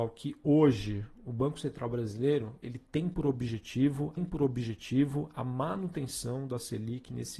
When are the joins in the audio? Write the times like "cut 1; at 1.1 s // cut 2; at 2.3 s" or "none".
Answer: cut 1; at 4.2 s